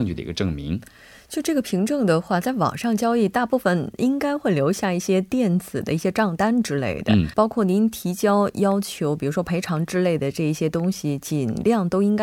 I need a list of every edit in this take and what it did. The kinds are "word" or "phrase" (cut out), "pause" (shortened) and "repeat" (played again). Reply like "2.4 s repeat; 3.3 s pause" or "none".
7.3 s word